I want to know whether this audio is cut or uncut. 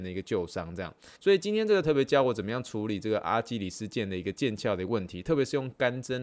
cut